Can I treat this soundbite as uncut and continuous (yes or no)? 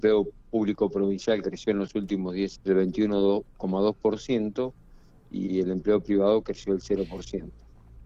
no